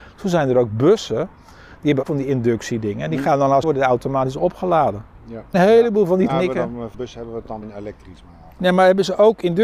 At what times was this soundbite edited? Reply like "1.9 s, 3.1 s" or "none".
2.0 s, 3.6 s, 5.1 s, 5.5 s, 6.3 s, 6.9 s, 7.6 s